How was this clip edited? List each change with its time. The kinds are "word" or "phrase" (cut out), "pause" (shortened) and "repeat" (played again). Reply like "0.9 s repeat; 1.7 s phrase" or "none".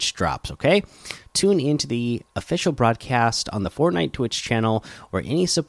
none